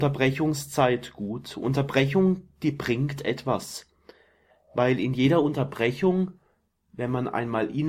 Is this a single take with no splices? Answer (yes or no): yes